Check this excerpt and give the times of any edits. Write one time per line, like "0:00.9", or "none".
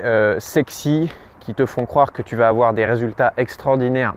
none